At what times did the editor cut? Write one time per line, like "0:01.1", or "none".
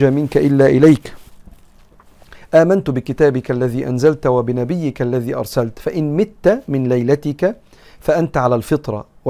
none